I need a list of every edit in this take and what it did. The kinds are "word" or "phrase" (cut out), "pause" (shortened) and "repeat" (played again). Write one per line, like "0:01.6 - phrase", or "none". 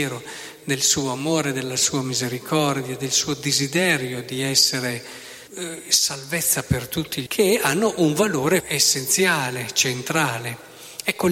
0:05.5 - pause
0:07.3 - word
0:08.6 - word